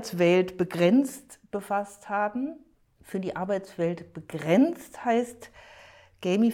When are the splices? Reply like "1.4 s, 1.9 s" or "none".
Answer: none